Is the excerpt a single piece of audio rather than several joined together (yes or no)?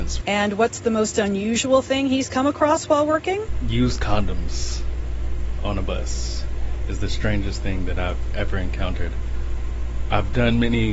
yes